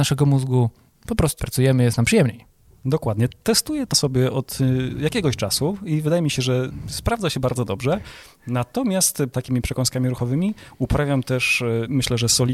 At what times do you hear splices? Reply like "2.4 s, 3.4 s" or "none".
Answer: 1.4 s, 3.9 s, 9.3 s